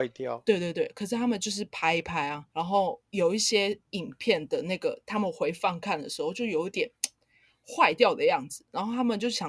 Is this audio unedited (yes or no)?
no